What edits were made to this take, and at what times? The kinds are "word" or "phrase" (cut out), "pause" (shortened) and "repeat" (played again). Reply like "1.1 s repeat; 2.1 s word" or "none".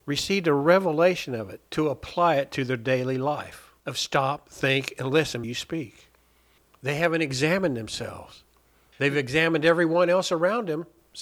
1.7 s pause; 3.8 s pause; 5.4 s word